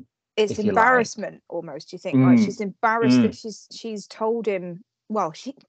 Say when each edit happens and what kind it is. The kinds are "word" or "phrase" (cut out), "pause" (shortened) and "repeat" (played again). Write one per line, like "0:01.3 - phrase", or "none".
none